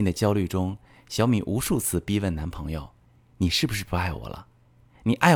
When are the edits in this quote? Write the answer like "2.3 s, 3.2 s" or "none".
none